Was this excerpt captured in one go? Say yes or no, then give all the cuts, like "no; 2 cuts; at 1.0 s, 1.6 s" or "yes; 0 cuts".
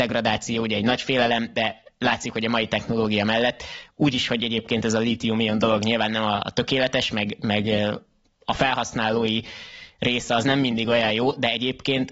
yes; 0 cuts